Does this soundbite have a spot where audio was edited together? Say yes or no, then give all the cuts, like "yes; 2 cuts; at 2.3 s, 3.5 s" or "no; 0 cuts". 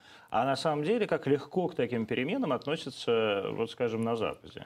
no; 0 cuts